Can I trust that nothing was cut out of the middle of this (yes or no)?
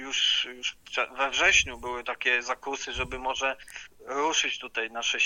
no